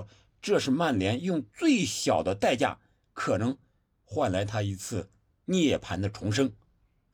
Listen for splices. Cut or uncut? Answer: uncut